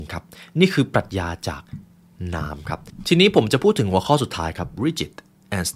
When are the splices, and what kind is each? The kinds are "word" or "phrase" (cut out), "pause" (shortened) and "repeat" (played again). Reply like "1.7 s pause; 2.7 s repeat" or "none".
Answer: 4.8 s word